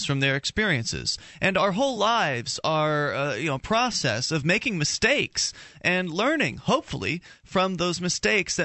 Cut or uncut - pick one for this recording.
uncut